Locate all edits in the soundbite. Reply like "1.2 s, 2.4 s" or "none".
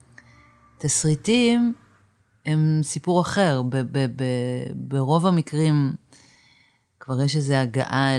none